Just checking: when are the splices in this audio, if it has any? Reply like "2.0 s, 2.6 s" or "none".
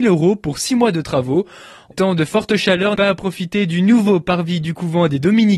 1.9 s, 2.9 s